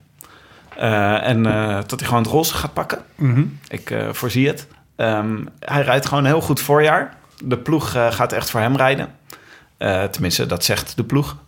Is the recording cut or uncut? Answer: uncut